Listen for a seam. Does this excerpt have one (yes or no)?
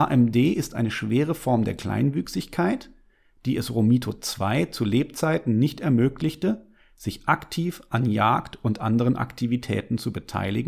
no